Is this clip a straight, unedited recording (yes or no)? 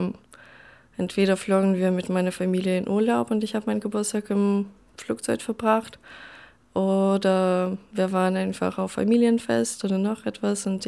yes